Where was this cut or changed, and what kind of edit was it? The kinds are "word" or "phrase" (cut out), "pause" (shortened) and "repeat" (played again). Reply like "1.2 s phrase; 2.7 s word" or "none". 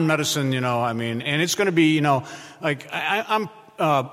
1.2 s word